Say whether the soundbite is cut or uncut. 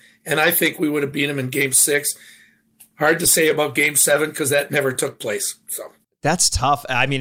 uncut